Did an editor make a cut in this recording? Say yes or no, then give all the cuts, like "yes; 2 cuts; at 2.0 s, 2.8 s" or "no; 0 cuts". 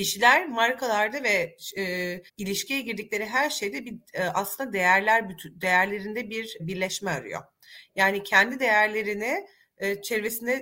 yes; 2 cuts; at 2.3 s, 6.6 s